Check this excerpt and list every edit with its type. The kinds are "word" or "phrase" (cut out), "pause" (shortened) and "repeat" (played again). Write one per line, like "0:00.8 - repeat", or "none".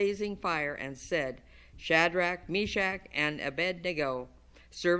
none